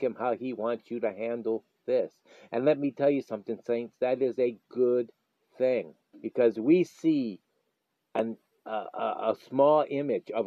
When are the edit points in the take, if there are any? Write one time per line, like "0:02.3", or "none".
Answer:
0:06.1